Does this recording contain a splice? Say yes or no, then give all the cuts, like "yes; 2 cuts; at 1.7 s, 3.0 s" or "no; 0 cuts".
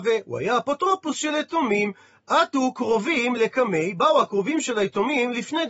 no; 0 cuts